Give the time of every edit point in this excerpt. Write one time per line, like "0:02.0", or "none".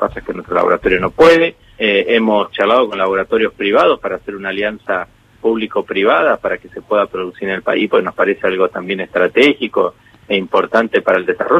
0:01.7